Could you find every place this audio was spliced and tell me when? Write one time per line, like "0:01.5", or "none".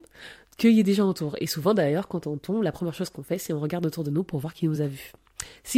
none